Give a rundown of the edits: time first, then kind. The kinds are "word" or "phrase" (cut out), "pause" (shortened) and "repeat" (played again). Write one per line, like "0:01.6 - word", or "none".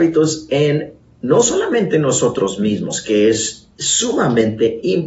none